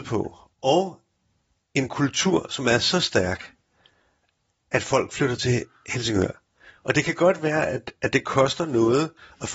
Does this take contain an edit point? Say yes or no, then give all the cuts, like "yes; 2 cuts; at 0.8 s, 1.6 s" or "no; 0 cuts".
no; 0 cuts